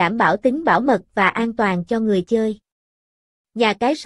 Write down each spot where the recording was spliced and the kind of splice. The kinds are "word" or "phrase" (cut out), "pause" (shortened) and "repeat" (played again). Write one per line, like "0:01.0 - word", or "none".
none